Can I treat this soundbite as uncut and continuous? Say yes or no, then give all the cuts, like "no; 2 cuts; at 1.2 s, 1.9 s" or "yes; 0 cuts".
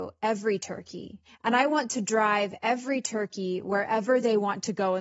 yes; 0 cuts